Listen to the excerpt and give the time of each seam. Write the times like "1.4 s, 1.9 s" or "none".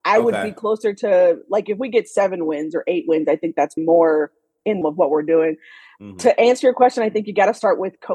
3.8 s, 4.8 s